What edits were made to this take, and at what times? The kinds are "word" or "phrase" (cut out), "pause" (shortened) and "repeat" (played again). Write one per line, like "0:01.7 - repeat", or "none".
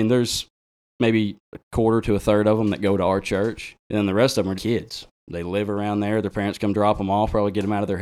0:03.8 - pause
0:04.6 - word